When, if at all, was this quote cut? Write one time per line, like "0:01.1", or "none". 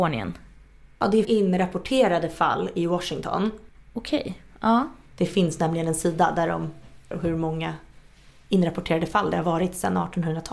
0:01.2
0:07.1